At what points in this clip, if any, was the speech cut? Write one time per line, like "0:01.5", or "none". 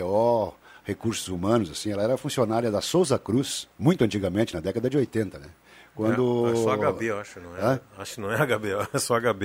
0:03.7